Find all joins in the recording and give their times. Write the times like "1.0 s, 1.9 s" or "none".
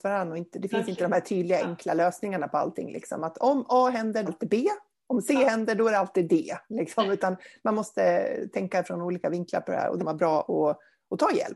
4.3 s, 10.0 s